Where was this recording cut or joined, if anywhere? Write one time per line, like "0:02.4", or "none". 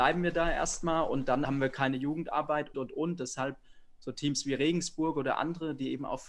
0:01.4
0:02.7